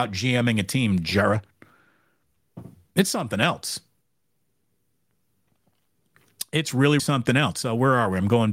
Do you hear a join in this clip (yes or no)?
yes